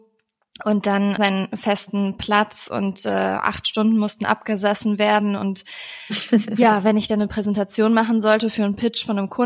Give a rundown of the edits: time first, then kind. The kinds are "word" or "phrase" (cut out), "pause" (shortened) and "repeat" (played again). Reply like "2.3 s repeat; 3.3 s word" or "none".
1.2 s phrase